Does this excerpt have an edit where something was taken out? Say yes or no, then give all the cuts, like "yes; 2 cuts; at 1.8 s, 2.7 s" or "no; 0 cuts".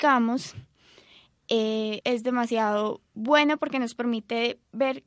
yes; 1 cut; at 2.0 s